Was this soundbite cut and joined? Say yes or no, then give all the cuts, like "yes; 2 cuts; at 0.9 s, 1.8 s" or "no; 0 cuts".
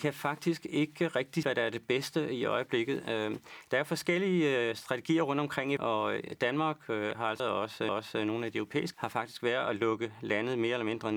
yes; 5 cuts; at 1.4 s, 5.8 s, 7.4 s, 7.9 s, 8.9 s